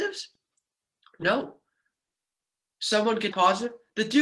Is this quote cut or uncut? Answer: cut